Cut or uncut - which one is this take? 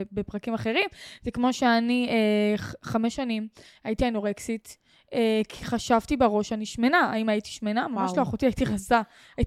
uncut